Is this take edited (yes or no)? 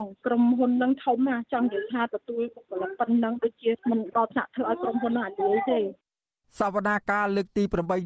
no